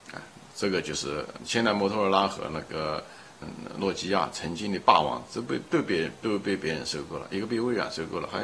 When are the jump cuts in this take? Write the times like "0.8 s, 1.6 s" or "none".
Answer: 1.4 s, 3.4 s